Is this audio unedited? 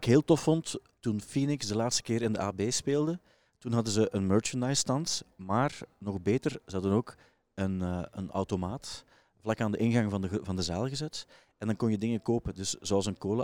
yes; 0 cuts

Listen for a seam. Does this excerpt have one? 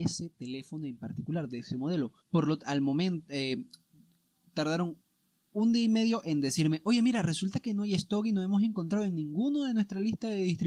yes; 1 cut; at 2.2 s

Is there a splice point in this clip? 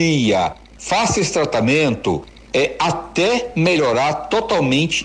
no; 0 cuts

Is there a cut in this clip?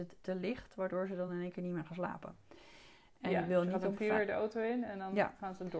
no; 0 cuts

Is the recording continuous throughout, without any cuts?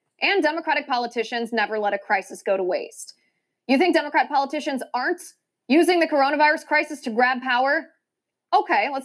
yes; 0 cuts

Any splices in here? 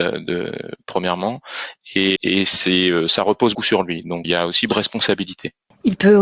yes; 4 cuts; at 2.2 s, 3.5 s, 4.2 s, 4.7 s

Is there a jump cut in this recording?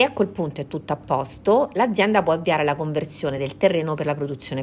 no; 0 cuts

